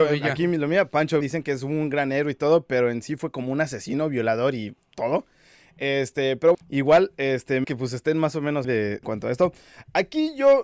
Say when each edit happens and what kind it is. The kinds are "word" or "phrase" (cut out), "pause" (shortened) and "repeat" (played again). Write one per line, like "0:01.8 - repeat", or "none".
0:01.2 - word
0:06.5 - word
0:07.6 - word
0:08.6 - word
0:09.0 - word